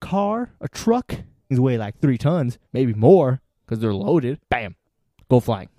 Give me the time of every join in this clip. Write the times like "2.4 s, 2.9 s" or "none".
1.5 s, 2.7 s